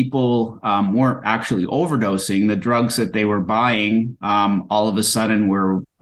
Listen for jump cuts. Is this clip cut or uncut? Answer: uncut